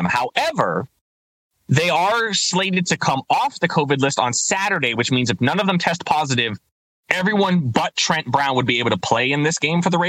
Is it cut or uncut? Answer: uncut